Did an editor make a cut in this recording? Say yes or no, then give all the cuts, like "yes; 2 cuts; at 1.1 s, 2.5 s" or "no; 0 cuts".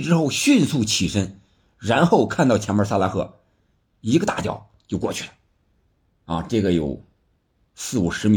no; 0 cuts